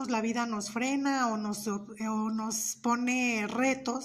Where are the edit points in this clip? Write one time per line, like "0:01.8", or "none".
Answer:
none

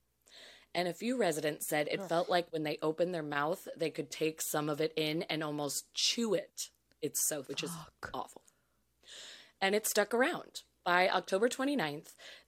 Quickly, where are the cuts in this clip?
0:07.4

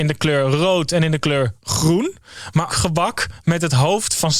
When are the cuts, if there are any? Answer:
0:02.7

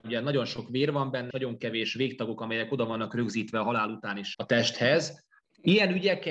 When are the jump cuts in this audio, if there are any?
0:01.3
0:04.3

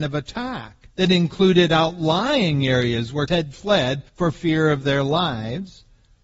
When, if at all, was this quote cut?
0:00.9
0:03.3
0:04.1

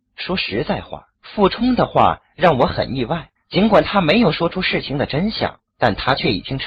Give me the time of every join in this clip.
0:01.1
0:03.4
0:05.7

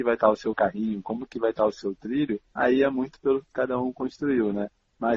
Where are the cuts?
0:02.5

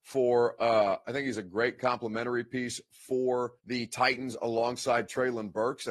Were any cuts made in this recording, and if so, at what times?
0:03.6

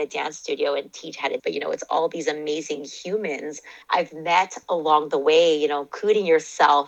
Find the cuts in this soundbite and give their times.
0:01.4
0:03.8

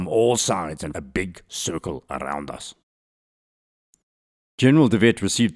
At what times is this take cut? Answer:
0:00.9

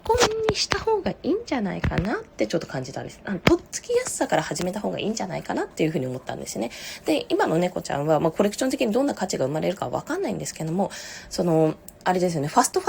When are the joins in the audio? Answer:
0:02.3
0:05.7
0:12.0

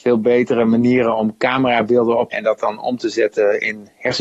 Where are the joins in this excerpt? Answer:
0:02.3

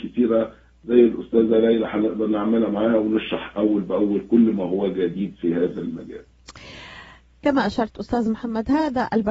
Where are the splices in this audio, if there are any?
none

